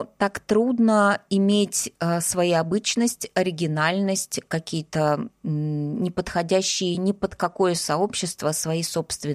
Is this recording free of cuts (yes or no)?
yes